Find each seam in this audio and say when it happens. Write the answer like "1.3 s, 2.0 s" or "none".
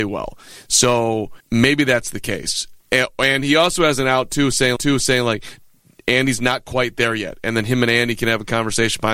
1.4 s, 4.8 s